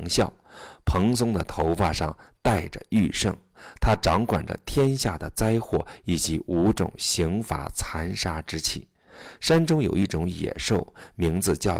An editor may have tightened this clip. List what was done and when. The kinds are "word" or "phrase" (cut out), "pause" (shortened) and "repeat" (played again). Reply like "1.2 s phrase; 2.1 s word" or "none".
none

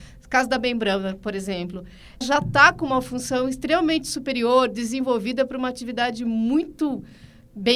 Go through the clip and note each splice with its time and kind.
2.2 s word

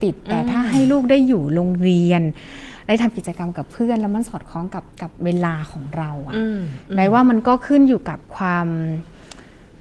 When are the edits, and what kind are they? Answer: 4.9 s pause; 8.3 s pause

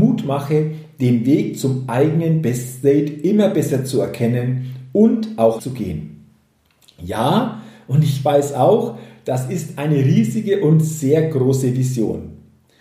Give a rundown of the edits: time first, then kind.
5.6 s word

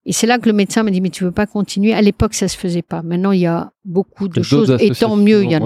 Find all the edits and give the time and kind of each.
3.8 s pause

